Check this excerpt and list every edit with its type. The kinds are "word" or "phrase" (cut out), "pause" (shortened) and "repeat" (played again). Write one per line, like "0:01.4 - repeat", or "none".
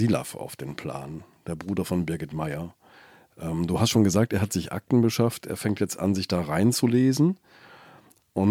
none